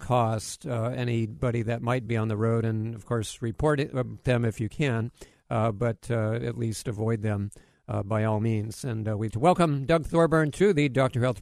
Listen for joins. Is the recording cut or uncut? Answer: cut